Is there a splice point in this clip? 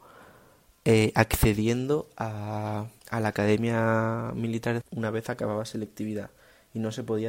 yes; 2 cuts; at 3.0 s, 4.8 s

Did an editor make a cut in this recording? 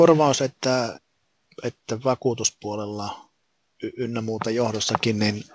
yes; 2 cuts; at 0.9 s, 3.4 s

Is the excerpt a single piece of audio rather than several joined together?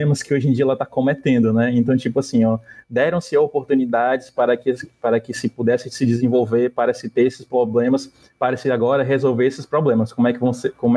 yes; 0 cuts

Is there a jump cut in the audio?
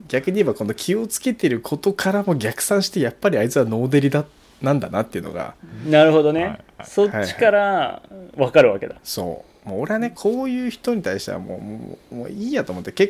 yes; 1 cut; at 9.0 s

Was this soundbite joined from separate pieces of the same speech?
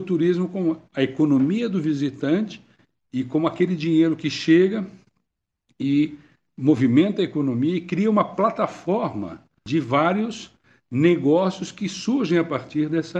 no; 0 cuts

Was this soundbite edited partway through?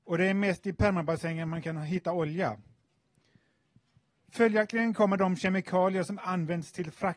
no; 0 cuts

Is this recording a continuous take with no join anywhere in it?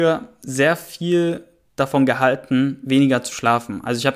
yes; 0 cuts

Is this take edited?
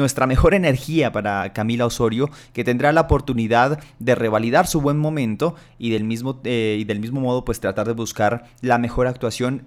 no; 0 cuts

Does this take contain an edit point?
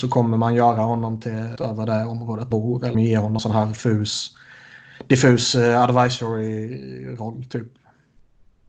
yes; 4 cuts; at 1.6 s, 2.5 s, 2.9 s, 3.4 s

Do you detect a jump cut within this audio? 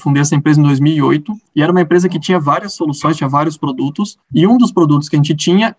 yes; 2 cuts; at 1.5 s, 4.2 s

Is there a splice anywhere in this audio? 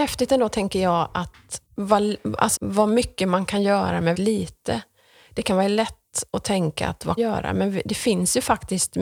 yes; 4 cuts; at 1.7 s, 2.6 s, 4.1 s, 7.2 s

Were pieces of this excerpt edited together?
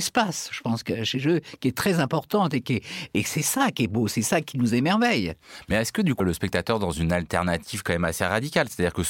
yes; 1 cut; at 6.2 s

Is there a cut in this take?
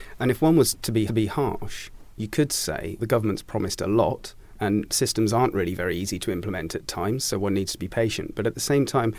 yes; 2 cuts; at 1.1 s, 3.0 s

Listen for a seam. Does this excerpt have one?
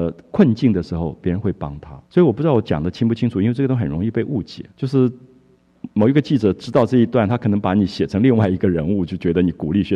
yes; 3 cuts; at 2.0 s, 4.7 s, 5.9 s

